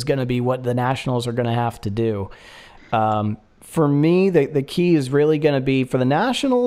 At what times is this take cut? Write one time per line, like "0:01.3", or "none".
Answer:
none

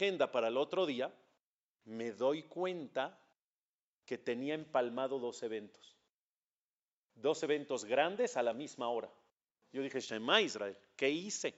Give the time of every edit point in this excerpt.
none

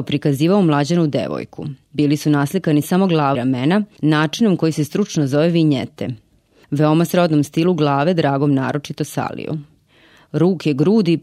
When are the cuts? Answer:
0:01.8
0:03.3

